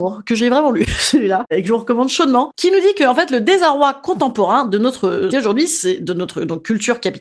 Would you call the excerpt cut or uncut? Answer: cut